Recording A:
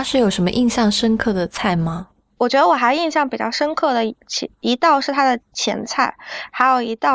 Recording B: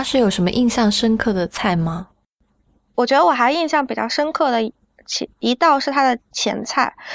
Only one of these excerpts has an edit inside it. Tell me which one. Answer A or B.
A